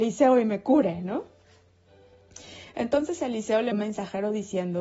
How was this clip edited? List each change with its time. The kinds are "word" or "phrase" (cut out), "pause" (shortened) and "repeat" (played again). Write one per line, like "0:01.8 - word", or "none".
0:03.7 - word

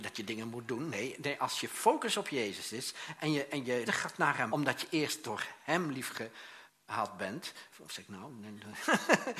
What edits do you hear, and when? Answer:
0:03.9 - word
0:04.5 - word
0:07.7 - pause

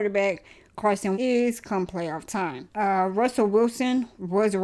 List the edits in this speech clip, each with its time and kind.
0:01.1 - word
0:02.7 - pause

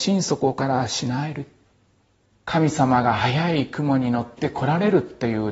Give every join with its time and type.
0:02.0 - pause

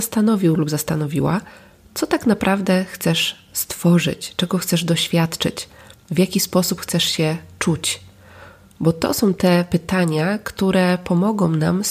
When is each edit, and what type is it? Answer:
none

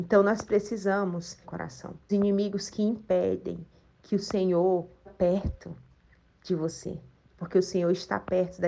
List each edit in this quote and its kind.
0:01.4 - phrase
0:02.1 - word
0:05.1 - word

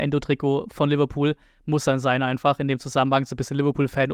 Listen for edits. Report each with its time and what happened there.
none

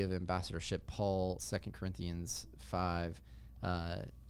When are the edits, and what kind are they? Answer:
0:01.4 - word

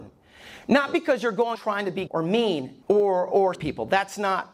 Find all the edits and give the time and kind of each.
0:01.5 - word
0:02.1 - word
0:02.8 - pause
0:03.5 - word

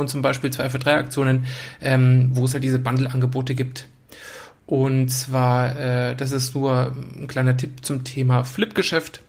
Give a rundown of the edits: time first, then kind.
none

